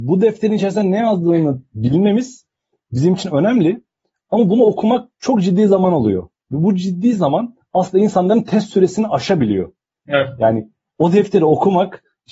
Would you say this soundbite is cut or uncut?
uncut